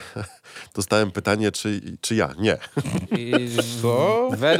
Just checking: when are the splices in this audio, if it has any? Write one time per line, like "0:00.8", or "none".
none